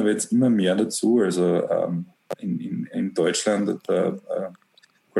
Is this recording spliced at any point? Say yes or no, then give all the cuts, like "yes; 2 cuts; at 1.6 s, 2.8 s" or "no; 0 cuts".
no; 0 cuts